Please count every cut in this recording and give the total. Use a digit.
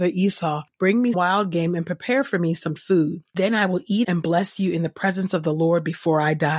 3